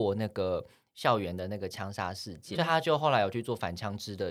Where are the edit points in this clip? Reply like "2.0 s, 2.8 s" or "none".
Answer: 2.5 s